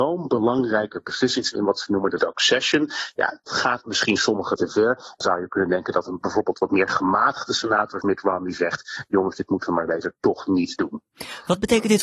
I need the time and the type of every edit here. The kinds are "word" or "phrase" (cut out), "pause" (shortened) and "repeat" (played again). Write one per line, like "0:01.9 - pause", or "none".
0:01.5 - word
0:02.2 - word
0:03.5 - word
0:04.6 - word
0:05.2 - word
0:08.0 - word